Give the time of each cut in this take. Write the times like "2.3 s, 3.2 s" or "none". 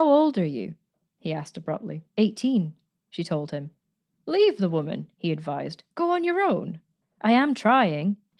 2.1 s, 5.9 s, 7.0 s